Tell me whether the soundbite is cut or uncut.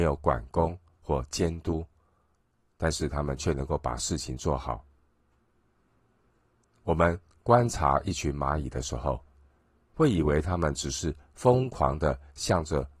uncut